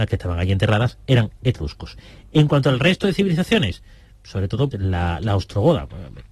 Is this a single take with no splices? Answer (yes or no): no